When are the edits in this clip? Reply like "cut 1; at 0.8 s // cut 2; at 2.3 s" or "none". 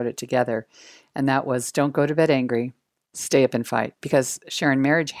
none